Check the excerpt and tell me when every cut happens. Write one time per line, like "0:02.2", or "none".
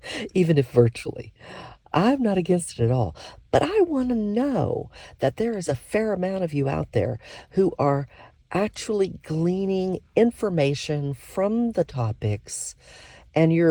none

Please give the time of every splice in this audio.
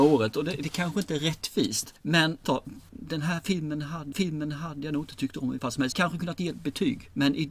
0:02.4
0:04.1
0:05.6
0:05.9
0:06.5

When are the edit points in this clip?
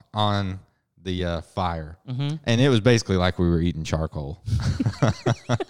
none

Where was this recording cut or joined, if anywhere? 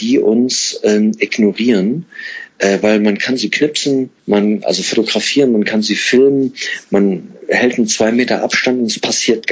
0:04.2

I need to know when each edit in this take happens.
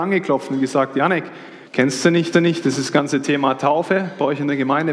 0:01.7
0:02.3

